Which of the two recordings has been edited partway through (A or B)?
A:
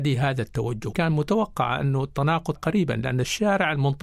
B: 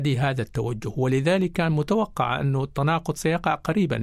A